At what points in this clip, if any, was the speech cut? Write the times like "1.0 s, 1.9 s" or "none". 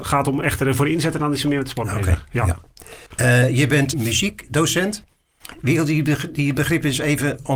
3.1 s, 3.9 s

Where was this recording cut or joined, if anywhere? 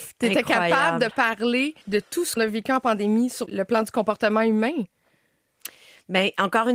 1.8 s, 2.4 s, 3.5 s

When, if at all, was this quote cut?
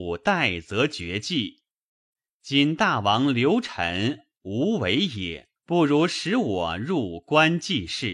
5.6 s

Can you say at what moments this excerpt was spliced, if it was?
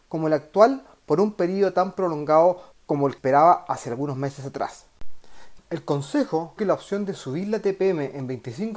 2.7 s, 3.2 s, 5.6 s, 6.6 s

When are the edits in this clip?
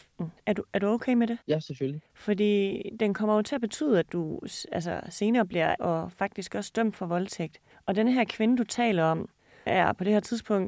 1.4 s, 2.1 s, 5.8 s, 7.7 s, 9.7 s

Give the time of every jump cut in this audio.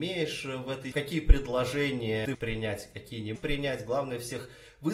0.9 s, 2.3 s, 3.4 s

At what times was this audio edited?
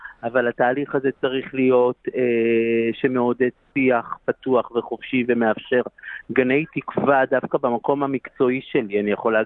none

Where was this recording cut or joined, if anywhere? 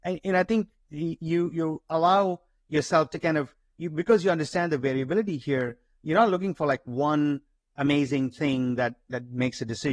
none

